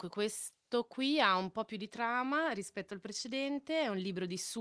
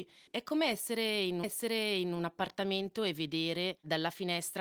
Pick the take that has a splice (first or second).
second